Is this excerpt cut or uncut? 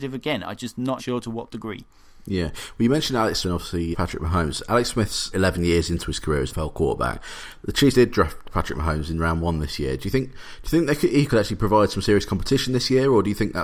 cut